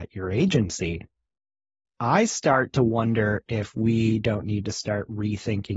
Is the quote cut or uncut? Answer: uncut